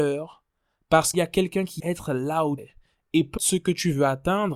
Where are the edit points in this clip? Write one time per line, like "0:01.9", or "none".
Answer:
0:01.1
0:01.8
0:02.6
0:03.4